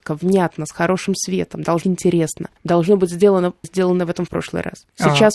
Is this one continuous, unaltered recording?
no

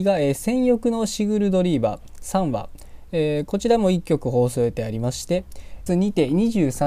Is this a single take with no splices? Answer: no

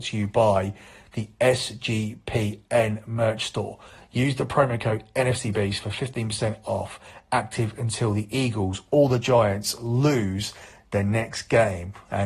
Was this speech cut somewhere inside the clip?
no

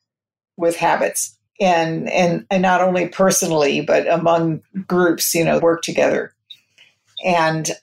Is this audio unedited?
no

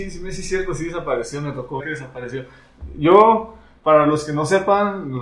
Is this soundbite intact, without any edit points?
no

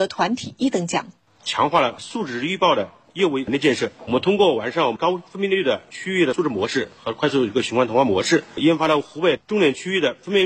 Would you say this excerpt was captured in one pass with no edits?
yes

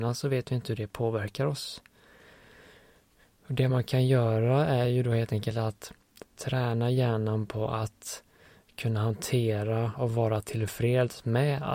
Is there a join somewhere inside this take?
no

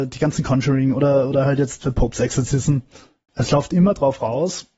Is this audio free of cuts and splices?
yes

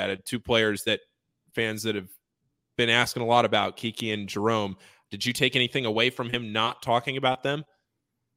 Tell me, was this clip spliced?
no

